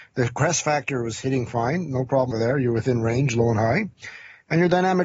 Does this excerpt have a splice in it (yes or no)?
yes